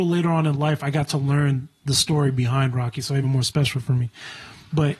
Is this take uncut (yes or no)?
no